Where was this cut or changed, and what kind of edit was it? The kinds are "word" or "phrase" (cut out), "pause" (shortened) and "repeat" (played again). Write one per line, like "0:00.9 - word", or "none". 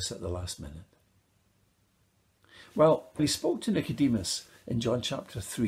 0:03.2 - word